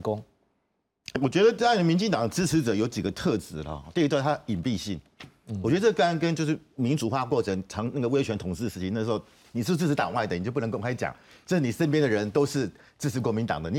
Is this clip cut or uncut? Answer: cut